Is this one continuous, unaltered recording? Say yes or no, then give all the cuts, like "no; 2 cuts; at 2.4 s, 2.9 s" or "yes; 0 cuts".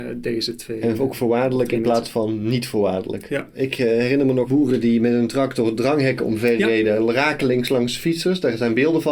yes; 0 cuts